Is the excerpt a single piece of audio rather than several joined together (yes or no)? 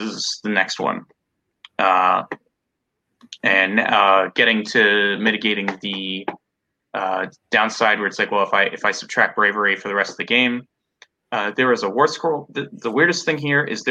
yes